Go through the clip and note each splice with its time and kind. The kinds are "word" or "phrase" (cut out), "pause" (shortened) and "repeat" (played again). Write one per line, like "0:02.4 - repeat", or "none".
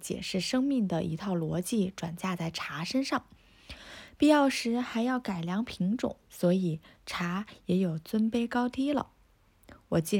0:06.2 - pause